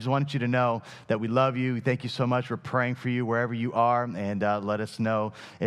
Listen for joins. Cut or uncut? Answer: uncut